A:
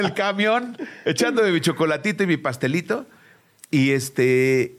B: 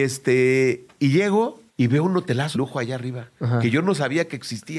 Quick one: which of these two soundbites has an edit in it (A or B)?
B